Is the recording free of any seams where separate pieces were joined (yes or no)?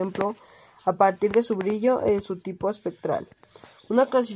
yes